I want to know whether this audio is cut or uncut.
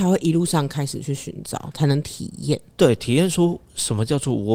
uncut